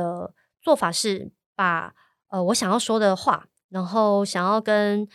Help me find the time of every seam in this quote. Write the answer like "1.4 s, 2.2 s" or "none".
none